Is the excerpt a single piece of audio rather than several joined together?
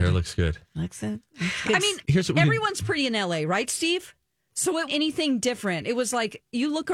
no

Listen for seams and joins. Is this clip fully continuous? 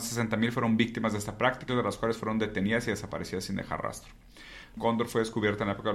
no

